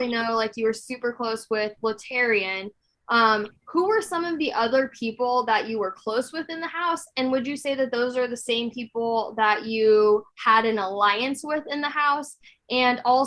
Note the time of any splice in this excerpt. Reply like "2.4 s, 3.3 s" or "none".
3.6 s